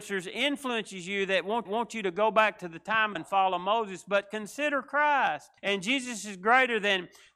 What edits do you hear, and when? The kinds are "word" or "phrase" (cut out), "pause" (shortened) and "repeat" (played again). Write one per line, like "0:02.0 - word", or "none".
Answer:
0:01.7 - repeat
0:03.2 - phrase
0:05.6 - pause